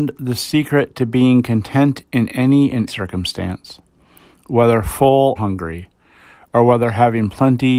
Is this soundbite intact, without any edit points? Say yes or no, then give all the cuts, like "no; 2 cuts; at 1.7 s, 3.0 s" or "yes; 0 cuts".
no; 2 cuts; at 2.9 s, 5.4 s